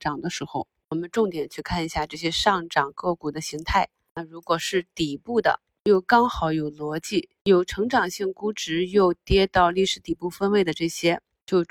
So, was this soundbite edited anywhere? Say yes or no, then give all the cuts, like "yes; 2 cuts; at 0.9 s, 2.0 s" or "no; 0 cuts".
no; 0 cuts